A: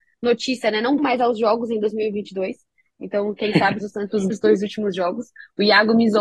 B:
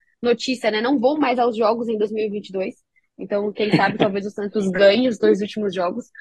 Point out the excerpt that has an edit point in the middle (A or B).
A